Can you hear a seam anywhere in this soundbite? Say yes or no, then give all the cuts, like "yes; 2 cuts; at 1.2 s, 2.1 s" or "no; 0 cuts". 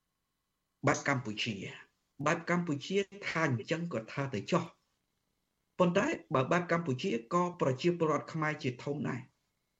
no; 0 cuts